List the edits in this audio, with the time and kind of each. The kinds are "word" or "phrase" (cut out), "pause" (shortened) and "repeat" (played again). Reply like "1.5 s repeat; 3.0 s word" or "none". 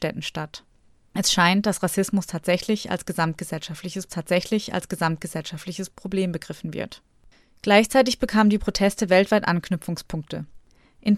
4.1 s repeat